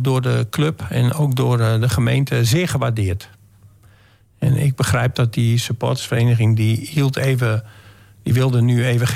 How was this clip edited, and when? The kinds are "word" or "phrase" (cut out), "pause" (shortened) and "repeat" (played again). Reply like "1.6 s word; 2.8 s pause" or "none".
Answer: none